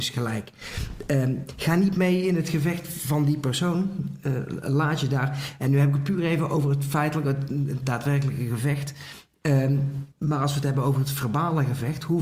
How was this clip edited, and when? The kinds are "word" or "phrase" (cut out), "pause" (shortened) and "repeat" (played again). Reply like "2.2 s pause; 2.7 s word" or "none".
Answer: 10.1 s pause